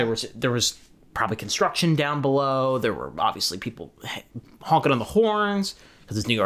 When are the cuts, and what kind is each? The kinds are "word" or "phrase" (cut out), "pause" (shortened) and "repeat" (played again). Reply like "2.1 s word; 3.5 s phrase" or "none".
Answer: none